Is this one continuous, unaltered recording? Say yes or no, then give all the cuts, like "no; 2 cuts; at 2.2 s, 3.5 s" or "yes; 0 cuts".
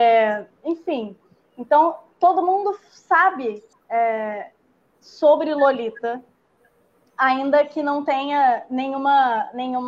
yes; 0 cuts